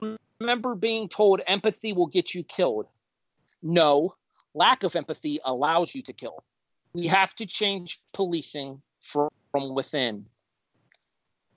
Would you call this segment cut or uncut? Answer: uncut